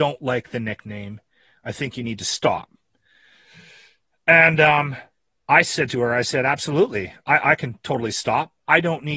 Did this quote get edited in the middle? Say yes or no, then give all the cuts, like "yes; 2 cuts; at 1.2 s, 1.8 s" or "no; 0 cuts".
no; 0 cuts